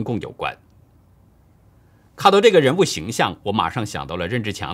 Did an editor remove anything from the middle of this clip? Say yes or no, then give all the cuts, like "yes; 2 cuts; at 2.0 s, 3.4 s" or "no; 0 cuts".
no; 0 cuts